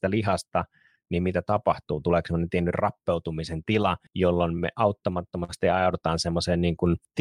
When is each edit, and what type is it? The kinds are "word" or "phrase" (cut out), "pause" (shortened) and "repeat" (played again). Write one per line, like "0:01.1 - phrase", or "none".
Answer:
0:04.1 - pause